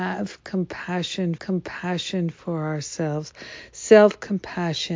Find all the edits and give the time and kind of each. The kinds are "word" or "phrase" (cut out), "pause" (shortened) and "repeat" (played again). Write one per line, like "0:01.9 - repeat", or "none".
0:01.4 - repeat